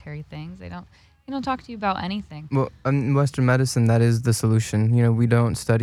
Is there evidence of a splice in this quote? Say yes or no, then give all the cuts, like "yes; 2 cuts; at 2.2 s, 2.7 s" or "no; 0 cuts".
no; 0 cuts